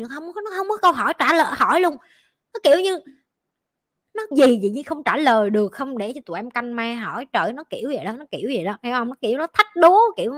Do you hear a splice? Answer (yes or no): yes